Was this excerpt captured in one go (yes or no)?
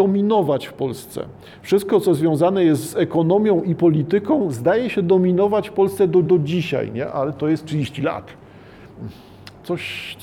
no